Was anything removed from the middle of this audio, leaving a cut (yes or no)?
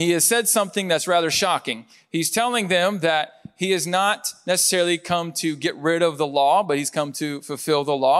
no